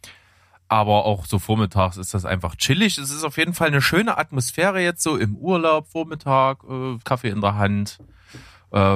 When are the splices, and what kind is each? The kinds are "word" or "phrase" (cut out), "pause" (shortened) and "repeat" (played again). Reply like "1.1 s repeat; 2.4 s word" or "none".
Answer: 7.0 s pause